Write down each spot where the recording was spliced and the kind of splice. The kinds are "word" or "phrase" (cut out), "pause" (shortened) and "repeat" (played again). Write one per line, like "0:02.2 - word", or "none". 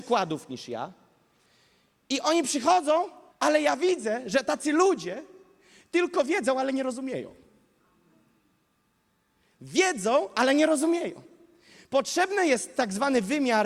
0:03.3 - pause